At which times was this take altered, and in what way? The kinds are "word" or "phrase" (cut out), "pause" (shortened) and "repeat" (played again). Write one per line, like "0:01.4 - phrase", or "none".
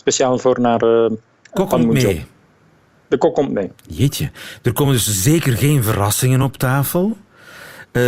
none